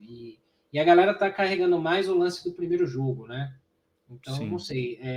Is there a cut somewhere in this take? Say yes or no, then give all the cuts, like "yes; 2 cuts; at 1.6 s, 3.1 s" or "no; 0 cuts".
no; 0 cuts